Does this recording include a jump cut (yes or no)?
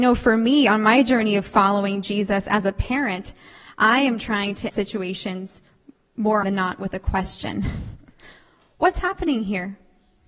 yes